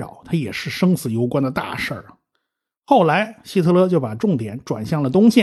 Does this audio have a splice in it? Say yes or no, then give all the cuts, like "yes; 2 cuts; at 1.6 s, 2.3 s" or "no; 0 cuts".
no; 0 cuts